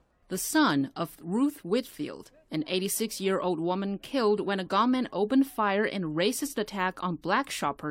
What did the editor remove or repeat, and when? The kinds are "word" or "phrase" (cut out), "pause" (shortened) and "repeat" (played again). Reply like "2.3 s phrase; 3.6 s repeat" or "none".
none